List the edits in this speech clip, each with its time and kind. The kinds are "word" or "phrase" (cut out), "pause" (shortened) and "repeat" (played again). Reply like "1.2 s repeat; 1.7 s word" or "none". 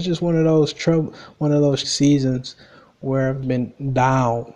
1.8 s word; 3.4 s word